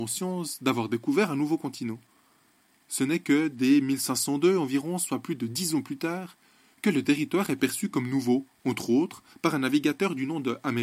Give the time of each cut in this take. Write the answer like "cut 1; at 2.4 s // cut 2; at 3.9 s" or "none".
none